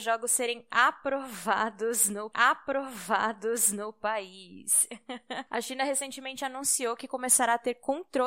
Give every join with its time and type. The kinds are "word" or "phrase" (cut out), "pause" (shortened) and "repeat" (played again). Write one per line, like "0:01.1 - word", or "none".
0:02.3 - repeat